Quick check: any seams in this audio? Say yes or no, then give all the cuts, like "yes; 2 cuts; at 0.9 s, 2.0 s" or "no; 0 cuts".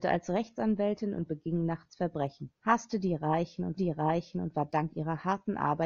yes; 2 cuts; at 2.6 s, 3.8 s